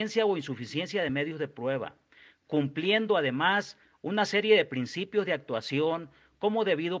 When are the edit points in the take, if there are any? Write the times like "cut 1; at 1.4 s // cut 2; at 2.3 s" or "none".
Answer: none